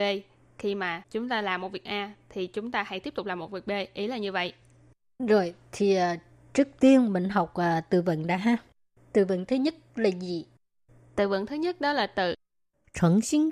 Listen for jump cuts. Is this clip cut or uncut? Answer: uncut